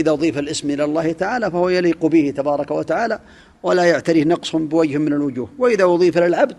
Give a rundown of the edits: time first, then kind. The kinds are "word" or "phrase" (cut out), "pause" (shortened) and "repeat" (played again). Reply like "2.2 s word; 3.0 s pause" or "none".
none

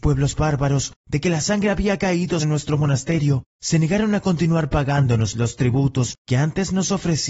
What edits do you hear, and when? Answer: 2.4 s word

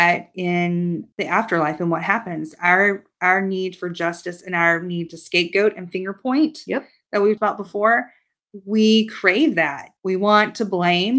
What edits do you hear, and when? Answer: 1.1 s pause; 7.4 s word; 10.0 s pause

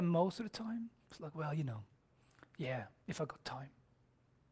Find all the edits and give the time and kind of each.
1.0 s pause

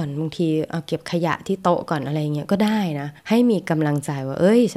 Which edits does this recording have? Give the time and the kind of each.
3.2 s pause

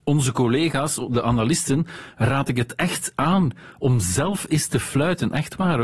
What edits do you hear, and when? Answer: none

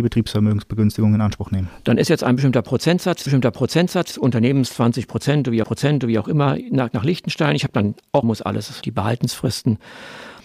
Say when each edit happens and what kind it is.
3.3 s repeat; 5.6 s repeat; 6.9 s word; 8.2 s word; 8.8 s word

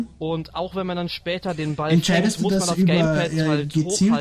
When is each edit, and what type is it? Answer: none

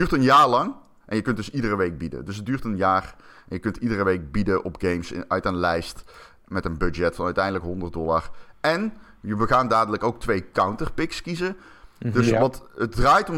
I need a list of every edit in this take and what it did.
none

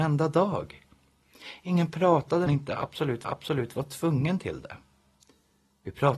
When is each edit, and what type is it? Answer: 2.5 s phrase; 3.2 s repeat

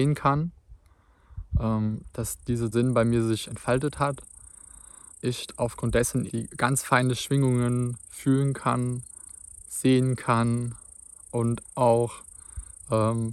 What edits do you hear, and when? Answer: 2.7 s word; 3.5 s word; 5.1 s word; 6.3 s word

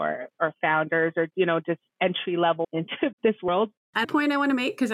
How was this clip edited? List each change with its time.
2.6 s word; 3.1 s word; 4.0 s word

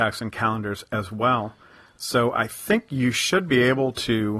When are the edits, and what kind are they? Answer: none

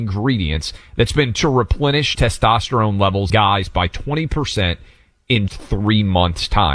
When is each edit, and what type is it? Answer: 1.3 s word; 2.1 s word; 3.3 s word; 5.5 s word

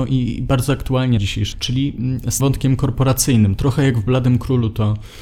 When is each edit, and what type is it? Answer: 1.2 s word; 1.5 s word; 2.4 s word

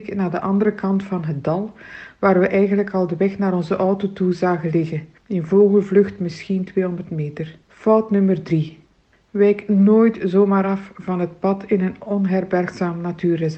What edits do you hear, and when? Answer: 5.2 s pause; 7.6 s pause; 9.1 s pause

